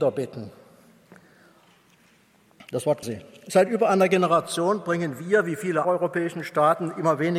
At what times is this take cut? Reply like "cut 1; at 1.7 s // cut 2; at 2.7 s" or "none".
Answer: cut 1; at 3.0 s // cut 2; at 5.8 s